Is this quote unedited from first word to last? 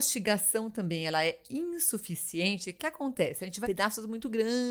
no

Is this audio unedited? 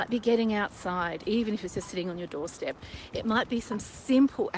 yes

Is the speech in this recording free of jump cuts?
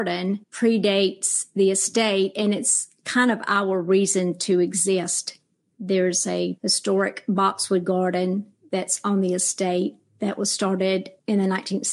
yes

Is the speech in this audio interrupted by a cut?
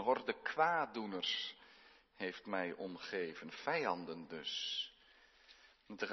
no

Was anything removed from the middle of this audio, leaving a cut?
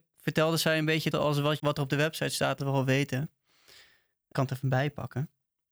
yes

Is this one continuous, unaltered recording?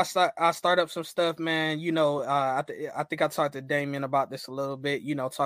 yes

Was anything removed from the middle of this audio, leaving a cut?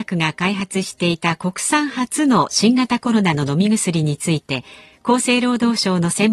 no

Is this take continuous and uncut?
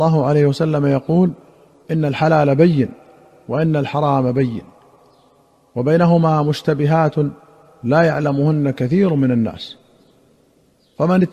yes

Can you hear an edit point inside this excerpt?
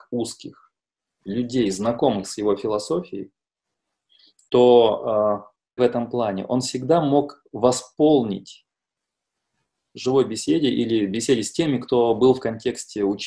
yes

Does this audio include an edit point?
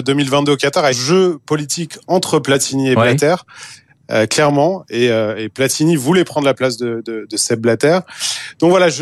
yes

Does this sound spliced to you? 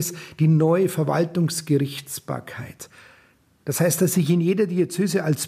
no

